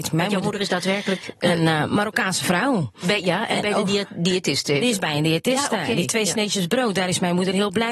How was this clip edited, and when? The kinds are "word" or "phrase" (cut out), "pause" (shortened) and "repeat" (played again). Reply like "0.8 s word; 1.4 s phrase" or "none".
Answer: none